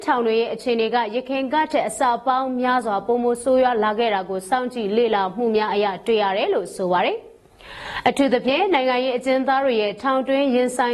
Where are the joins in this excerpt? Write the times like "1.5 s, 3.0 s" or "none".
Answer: none